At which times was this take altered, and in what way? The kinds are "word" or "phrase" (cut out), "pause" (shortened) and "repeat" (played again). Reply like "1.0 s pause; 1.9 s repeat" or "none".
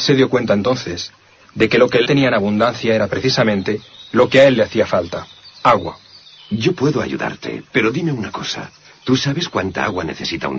2.1 s word